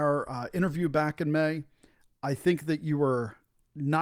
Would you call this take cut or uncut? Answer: uncut